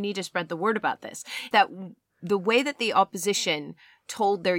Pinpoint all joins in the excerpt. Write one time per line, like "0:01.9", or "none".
0:01.5